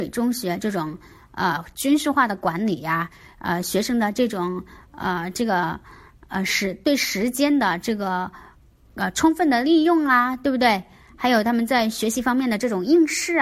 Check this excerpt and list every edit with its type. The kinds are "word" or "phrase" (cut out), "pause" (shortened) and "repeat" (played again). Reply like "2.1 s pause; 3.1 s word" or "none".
none